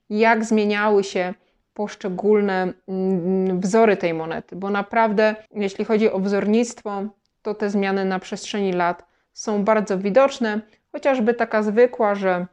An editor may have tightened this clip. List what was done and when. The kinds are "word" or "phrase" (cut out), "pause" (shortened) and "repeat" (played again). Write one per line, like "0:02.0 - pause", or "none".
0:05.5 - pause